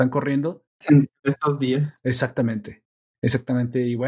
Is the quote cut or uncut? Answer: uncut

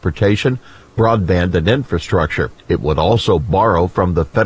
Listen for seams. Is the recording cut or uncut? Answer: cut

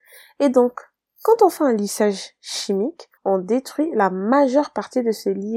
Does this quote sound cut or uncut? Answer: cut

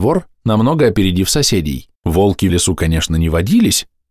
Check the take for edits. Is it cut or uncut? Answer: cut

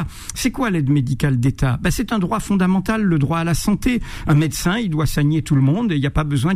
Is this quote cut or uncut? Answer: uncut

